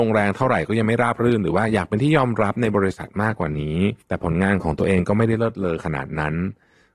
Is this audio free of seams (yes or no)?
no